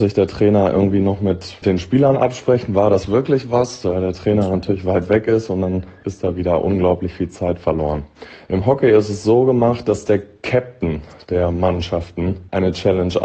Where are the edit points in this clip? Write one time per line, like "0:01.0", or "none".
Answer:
none